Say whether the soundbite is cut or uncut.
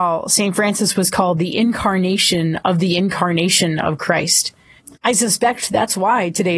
cut